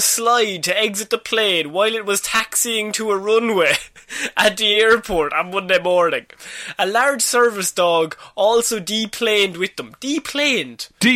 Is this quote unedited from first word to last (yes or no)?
yes